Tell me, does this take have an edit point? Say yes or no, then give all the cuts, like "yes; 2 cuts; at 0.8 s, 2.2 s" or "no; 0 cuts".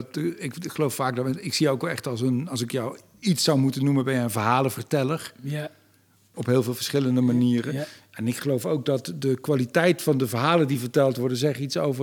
no; 0 cuts